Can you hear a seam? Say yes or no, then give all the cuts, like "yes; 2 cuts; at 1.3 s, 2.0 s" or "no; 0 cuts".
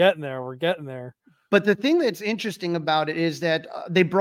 no; 0 cuts